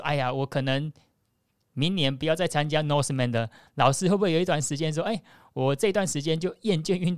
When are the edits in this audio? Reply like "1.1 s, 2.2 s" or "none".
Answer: none